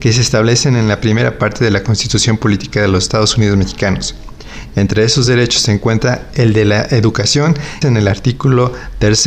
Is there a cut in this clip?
yes; 1 cut; at 7.8 s

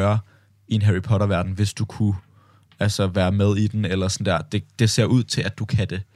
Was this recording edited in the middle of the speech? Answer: no; 0 cuts

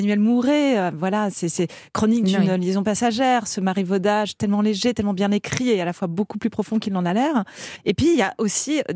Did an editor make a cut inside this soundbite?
no; 0 cuts

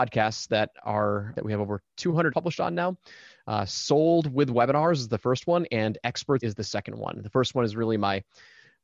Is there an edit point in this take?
yes; 3 cuts; at 1.3 s, 2.3 s, 6.4 s

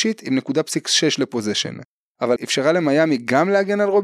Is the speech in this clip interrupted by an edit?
yes; 1 cut; at 2.4 s

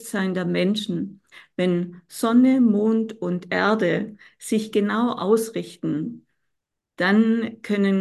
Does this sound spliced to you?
yes; 1 cut; at 5.2 s

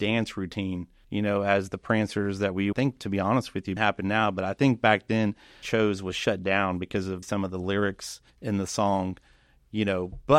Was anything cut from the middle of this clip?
yes; 6 cuts; at 1.0 s, 2.7 s, 3.8 s, 5.6 s, 7.2 s, 8.3 s

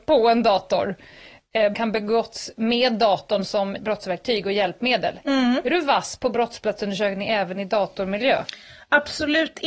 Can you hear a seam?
yes; 2 cuts; at 1.7 s, 3.8 s

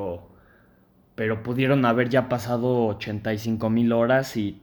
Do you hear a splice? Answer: no; 0 cuts

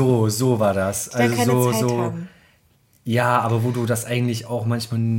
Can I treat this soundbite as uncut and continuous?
yes; 0 cuts

